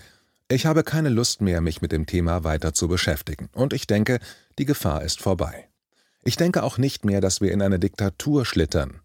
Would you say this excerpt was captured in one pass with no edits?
yes; 0 cuts

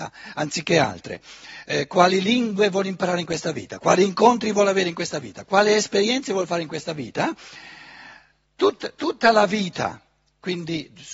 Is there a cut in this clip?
no; 0 cuts

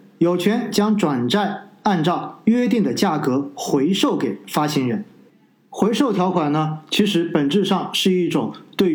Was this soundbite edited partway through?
no; 0 cuts

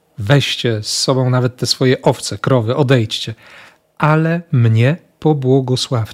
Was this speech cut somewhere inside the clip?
no; 0 cuts

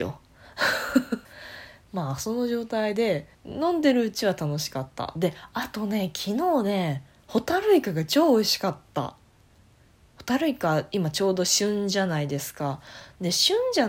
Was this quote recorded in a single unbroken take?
no; 2 cuts; at 1.2 s, 3.3 s

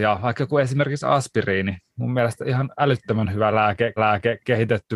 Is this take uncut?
no; 1 cut; at 4.0 s

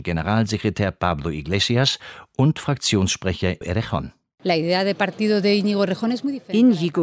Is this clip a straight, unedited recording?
no; 1 cut; at 3.6 s

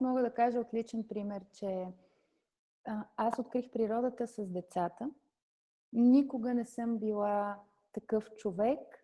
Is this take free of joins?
yes; 0 cuts

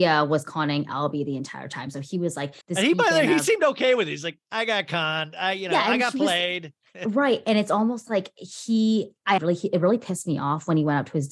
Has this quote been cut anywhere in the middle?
yes; 2 cuts; at 2.6 s, 9.4 s

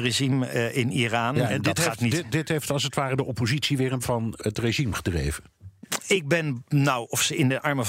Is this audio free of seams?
no; 3 cuts; at 1.5 s, 4.0 s, 4.4 s

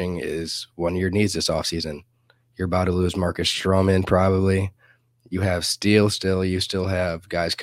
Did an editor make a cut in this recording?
no; 0 cuts

